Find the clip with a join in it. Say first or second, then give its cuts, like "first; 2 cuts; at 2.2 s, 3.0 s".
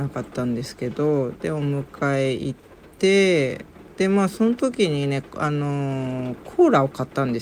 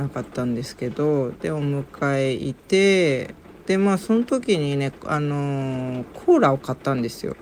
second; 1 cut; at 2.6 s